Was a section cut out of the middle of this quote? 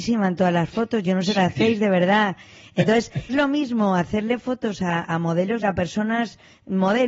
yes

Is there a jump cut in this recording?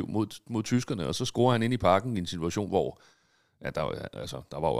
no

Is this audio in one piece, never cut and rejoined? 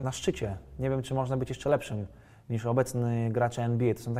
yes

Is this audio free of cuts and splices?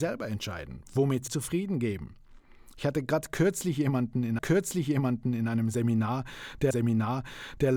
no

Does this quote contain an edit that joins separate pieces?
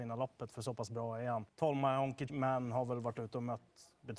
yes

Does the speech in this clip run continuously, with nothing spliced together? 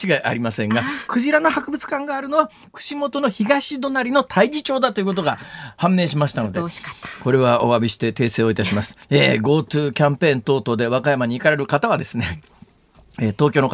no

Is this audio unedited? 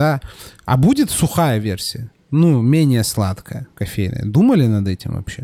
no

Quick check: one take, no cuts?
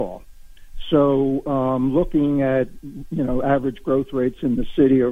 yes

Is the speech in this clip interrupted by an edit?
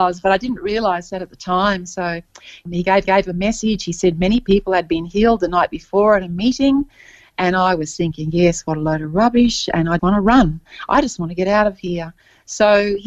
yes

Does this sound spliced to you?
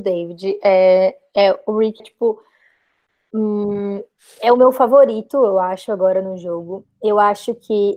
yes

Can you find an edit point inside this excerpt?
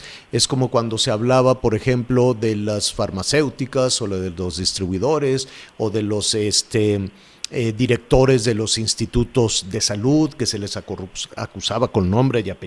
no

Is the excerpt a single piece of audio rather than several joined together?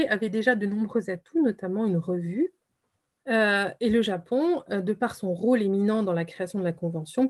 yes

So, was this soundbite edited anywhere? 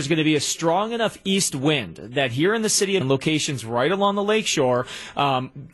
yes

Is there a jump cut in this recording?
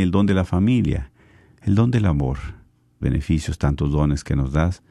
yes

